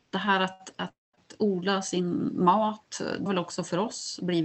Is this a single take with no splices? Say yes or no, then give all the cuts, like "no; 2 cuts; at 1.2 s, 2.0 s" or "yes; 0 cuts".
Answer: no; 1 cut; at 3.3 s